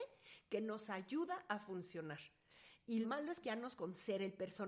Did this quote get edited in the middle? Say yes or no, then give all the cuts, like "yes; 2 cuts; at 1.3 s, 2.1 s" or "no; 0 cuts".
yes; 3 cuts; at 3.0 s, 3.4 s, 3.8 s